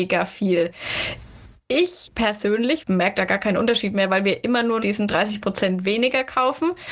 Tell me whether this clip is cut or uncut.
cut